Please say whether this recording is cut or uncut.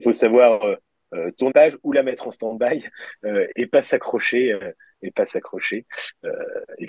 cut